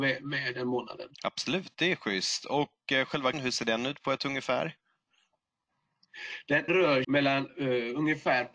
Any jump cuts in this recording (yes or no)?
yes